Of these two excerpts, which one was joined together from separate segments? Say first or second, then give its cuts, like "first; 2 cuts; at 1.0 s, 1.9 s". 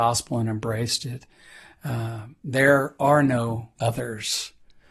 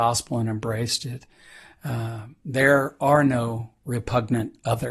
first; 1 cut; at 3.8 s